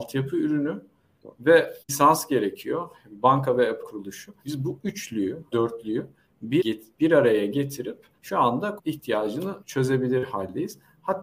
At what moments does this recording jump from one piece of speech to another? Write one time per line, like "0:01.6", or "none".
0:01.8
0:03.8
0:04.4
0:05.5
0:06.6
0:08.2
0:08.8
0:09.6